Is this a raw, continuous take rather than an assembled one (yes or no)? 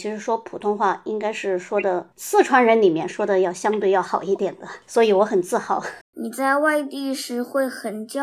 no